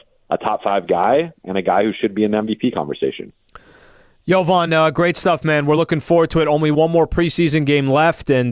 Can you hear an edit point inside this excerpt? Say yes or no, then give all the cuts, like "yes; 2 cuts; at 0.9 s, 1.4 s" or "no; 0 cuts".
no; 0 cuts